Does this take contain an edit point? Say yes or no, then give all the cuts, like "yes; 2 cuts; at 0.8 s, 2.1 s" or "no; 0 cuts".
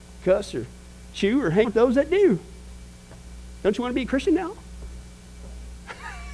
yes; 1 cut; at 1.6 s